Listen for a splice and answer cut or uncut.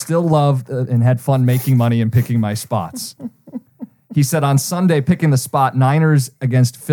uncut